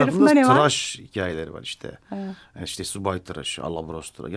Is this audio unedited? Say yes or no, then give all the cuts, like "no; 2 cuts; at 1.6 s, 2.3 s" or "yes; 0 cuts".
yes; 0 cuts